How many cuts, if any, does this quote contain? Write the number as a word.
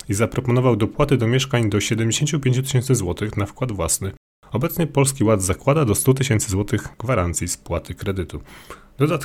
zero